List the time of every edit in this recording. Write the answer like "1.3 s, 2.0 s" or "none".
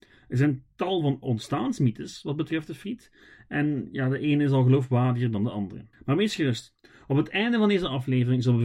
5.9 s